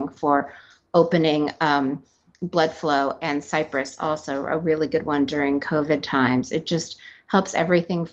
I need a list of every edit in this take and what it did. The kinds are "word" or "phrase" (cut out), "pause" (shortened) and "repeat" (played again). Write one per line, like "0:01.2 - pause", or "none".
none